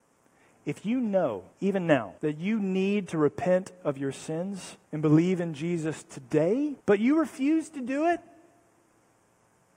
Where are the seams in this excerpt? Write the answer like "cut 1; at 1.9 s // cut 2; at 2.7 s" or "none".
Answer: cut 1; at 1.5 s // cut 2; at 2.2 s // cut 3; at 4.8 s // cut 4; at 6.8 s